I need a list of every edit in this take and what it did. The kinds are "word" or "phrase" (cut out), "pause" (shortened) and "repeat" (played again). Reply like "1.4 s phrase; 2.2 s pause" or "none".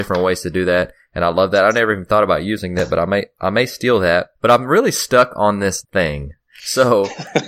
4.3 s pause; 5.8 s word